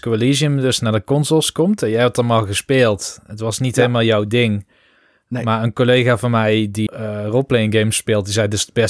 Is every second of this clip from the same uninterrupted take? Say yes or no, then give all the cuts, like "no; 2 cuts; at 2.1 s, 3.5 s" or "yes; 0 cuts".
no; 1 cut; at 6.9 s